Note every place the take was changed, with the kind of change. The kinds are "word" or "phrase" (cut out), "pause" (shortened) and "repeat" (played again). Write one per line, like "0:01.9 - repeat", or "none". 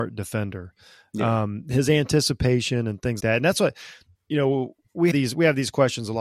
0:03.2 - word
0:05.1 - word